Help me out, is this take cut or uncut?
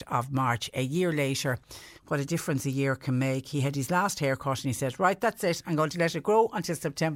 cut